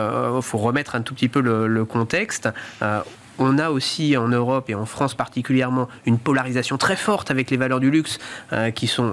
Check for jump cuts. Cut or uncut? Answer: uncut